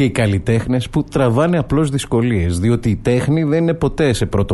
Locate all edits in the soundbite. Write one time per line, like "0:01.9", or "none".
none

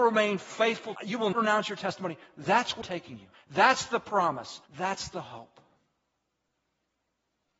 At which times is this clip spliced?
0:01.0
0:01.3
0:02.8
0:03.3
0:04.7

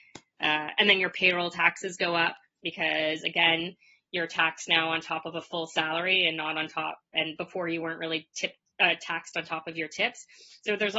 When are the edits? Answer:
none

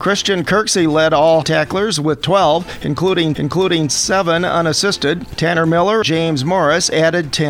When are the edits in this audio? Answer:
0:01.4
0:03.3
0:06.0

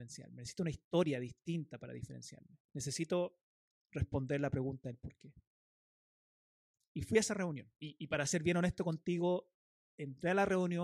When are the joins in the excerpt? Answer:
0:02.6
0:07.8

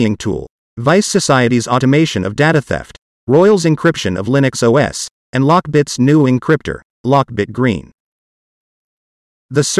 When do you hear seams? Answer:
none

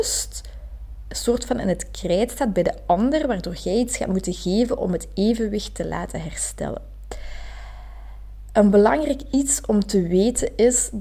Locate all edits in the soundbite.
none

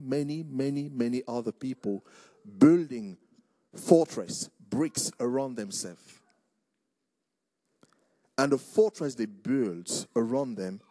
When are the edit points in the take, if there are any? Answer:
none

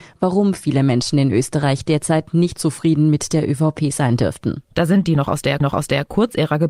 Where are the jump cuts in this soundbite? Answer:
0:02.6
0:04.6
0:05.0
0:05.6

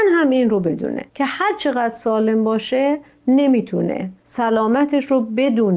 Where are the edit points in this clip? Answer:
0:01.1
0:04.2

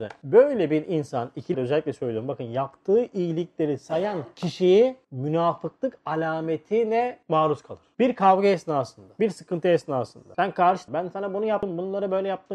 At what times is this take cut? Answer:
0:01.5
0:10.9

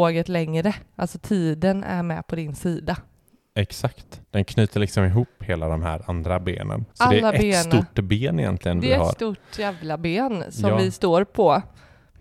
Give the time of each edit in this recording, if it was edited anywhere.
0:04.2
0:06.9

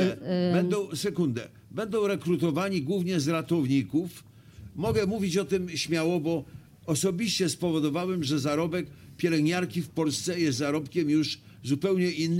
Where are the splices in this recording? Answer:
none

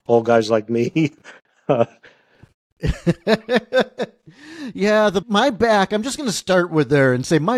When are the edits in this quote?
0:05.2

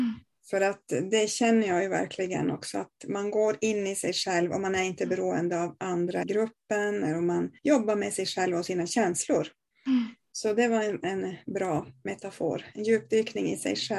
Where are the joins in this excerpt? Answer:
0:06.2
0:07.6

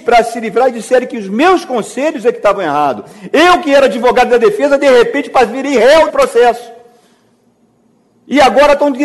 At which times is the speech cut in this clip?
0:06.1

